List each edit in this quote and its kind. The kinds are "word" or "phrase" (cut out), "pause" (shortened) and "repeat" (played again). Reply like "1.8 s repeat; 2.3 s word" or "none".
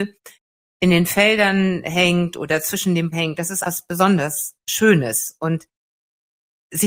3.1 s word; 3.6 s word